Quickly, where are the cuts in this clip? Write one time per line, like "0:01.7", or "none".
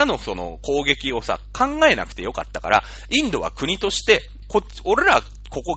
0:04.4